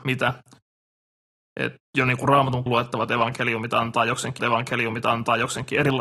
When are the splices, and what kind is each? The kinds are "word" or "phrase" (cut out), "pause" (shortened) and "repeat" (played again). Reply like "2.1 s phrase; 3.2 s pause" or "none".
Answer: 1.9 s pause; 2.7 s word; 4.4 s repeat